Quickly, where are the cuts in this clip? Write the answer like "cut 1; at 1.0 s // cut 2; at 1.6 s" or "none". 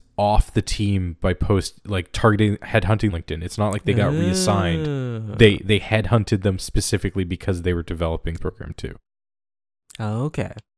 cut 1; at 3.1 s // cut 2; at 8.4 s